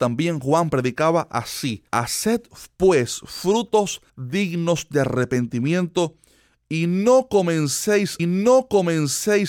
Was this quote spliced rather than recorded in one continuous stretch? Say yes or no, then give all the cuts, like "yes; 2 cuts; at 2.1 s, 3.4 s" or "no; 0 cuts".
yes; 3 cuts; at 1.9 s, 4.1 s, 8.2 s